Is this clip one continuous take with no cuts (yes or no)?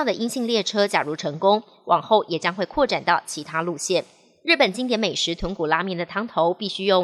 yes